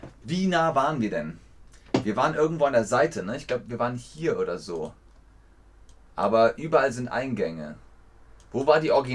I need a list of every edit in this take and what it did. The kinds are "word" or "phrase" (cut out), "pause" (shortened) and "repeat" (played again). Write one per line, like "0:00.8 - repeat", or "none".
none